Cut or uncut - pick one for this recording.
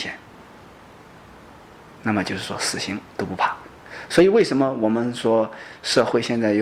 cut